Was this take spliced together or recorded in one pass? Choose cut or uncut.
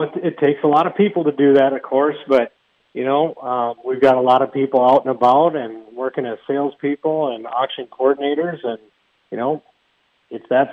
uncut